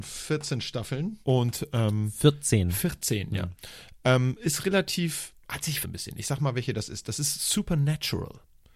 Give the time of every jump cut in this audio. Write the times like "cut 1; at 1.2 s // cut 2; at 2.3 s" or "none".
cut 1; at 1.2 s // cut 2; at 5.4 s // cut 3; at 5.8 s